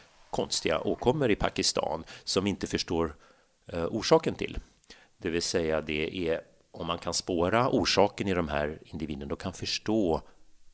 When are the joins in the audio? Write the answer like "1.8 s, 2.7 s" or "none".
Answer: 5.0 s

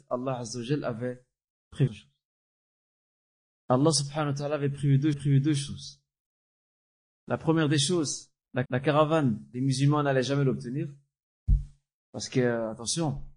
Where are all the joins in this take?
1.9 s, 5.1 s, 8.6 s

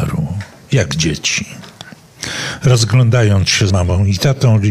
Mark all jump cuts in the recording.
3.7 s

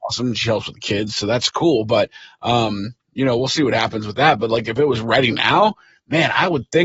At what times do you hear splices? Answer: none

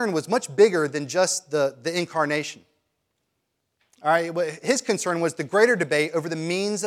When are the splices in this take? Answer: none

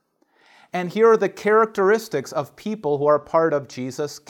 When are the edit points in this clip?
none

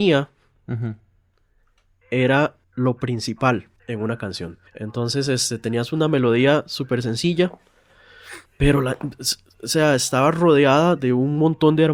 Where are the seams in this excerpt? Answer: 2.6 s, 3.8 s, 4.7 s, 8.5 s

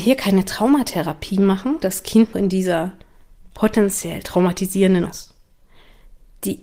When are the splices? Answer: 1.8 s, 2.3 s, 3.5 s, 5.1 s

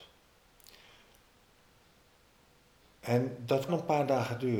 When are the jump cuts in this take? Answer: 3.7 s

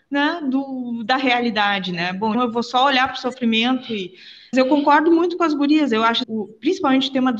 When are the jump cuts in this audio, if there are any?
2.3 s, 4.5 s, 6.2 s

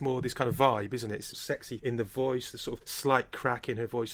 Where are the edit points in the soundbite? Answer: 1.3 s, 1.8 s, 2.8 s

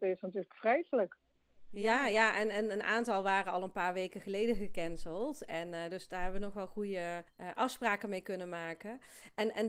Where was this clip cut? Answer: 7.3 s

